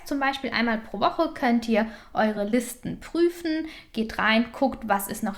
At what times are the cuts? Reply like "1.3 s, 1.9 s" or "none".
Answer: none